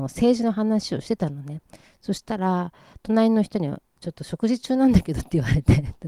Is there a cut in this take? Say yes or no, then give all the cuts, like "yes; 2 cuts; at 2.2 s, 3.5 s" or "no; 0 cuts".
no; 0 cuts